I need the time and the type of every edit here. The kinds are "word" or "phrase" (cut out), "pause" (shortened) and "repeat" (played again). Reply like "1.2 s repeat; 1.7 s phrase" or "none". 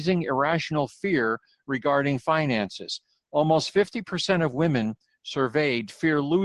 none